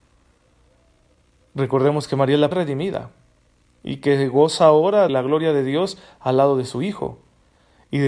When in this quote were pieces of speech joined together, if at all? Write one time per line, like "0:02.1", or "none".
0:02.5
0:05.1